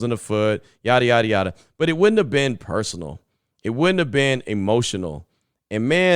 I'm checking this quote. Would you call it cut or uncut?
uncut